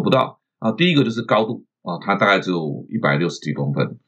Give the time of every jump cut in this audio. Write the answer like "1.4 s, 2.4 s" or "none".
none

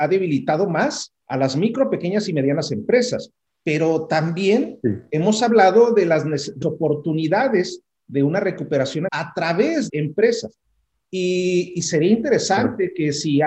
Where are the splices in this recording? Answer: 1.2 s, 3.5 s, 6.6 s, 9.1 s, 9.9 s

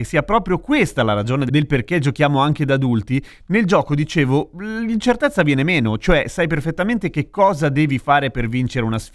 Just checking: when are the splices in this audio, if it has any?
none

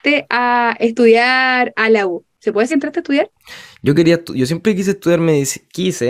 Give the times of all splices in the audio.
2.7 s

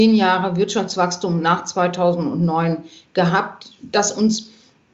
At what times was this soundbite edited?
none

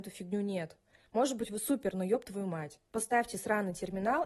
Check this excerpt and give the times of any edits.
1.9 s

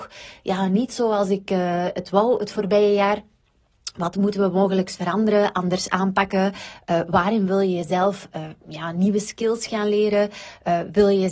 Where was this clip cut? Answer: none

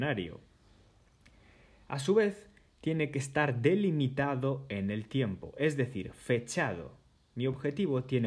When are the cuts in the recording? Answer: none

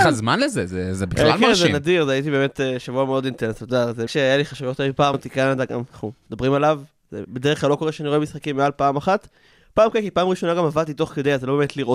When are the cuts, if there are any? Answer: 4.1 s, 5.1 s

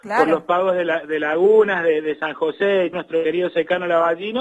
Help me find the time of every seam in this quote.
2.9 s

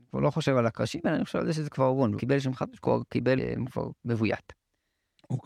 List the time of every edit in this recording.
2.2 s, 3.4 s, 4.0 s

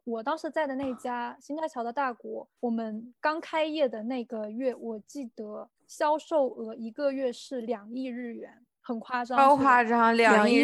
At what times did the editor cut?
2.6 s, 5.8 s

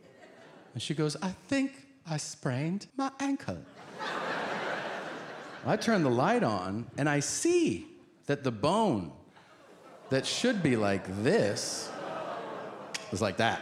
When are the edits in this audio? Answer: 2.9 s

